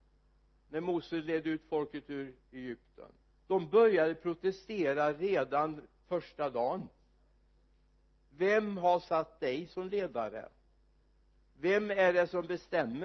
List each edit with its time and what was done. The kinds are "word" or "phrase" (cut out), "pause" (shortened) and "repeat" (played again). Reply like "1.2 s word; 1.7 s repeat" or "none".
3.2 s pause